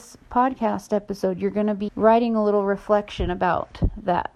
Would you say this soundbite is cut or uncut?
cut